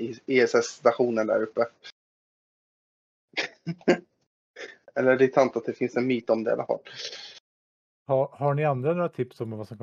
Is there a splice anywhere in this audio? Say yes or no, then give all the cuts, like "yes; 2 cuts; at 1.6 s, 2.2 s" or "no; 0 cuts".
no; 0 cuts